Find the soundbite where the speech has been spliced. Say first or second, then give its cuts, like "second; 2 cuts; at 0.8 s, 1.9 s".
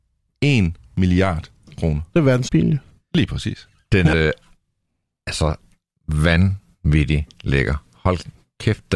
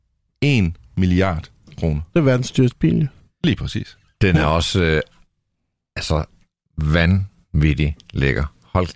first; 2 cuts; at 2.5 s, 4.1 s